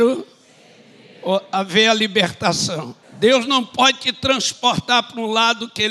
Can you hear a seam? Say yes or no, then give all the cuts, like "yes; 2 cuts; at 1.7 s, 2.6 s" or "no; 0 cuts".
yes; 1 cut; at 3.0 s